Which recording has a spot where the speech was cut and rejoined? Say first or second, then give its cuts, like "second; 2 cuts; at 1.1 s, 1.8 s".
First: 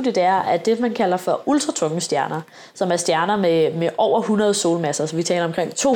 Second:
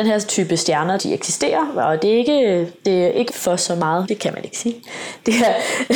second; 3 cuts; at 1.0 s, 3.3 s, 4.0 s